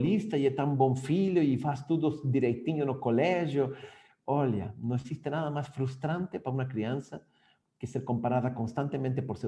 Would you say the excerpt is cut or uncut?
uncut